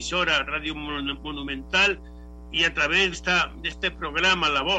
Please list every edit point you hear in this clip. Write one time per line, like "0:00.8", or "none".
0:03.1